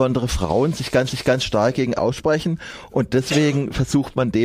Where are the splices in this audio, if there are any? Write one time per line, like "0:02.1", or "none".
0:01.1
0:02.0